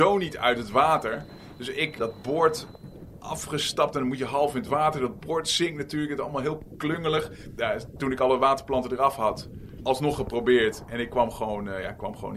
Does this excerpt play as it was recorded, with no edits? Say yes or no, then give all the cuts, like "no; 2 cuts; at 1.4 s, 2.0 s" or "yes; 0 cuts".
no; 1 cut; at 2.0 s